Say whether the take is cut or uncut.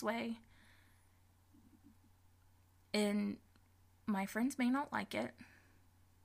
uncut